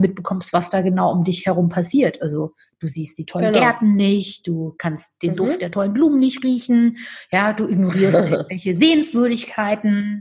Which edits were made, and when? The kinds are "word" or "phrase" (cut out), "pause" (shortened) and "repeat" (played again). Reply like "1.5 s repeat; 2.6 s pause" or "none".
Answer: none